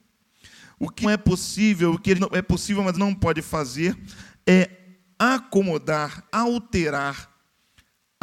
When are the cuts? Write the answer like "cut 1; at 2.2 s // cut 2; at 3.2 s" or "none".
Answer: cut 1; at 1.0 s // cut 2; at 2.2 s // cut 3; at 2.9 s // cut 4; at 6.3 s